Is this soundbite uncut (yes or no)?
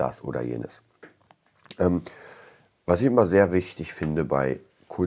yes